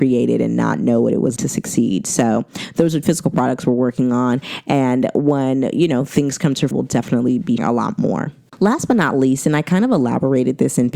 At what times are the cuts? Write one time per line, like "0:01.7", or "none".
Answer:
0:01.4
0:03.0
0:06.7
0:07.6